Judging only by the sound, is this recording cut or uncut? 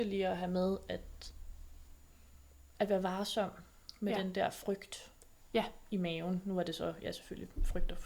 uncut